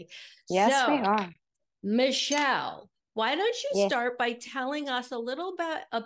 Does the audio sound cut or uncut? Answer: uncut